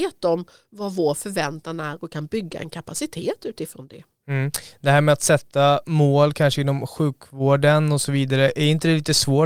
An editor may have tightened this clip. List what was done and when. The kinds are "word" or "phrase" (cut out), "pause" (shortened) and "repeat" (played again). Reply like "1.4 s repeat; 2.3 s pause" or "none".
none